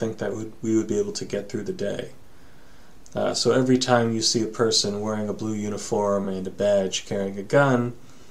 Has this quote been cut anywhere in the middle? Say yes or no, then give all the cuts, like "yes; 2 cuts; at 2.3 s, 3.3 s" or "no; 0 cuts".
no; 0 cuts